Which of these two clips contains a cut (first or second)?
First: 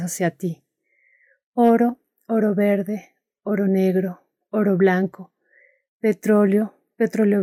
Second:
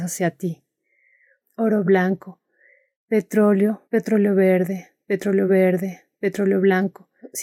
second